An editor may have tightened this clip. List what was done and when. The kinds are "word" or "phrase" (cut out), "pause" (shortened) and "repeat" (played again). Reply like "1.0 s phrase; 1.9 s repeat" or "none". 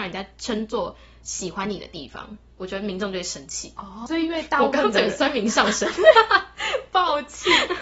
4.1 s word